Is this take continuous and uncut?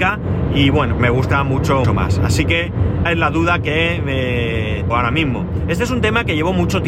no; 4 cuts; at 1.0 s, 1.8 s, 3.1 s, 4.9 s

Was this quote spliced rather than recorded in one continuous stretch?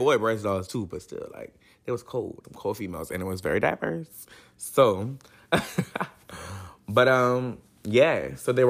yes; 1 cut; at 2.4 s

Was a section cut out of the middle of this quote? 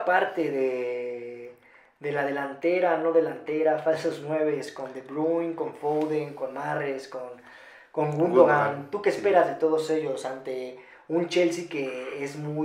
no; 0 cuts

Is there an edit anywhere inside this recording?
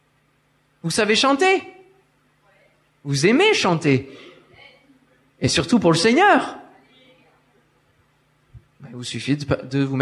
no; 0 cuts

